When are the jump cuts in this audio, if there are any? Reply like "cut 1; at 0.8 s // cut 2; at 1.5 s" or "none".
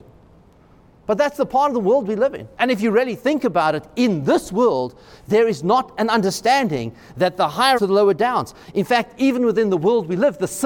cut 1; at 2.5 s // cut 2; at 7.7 s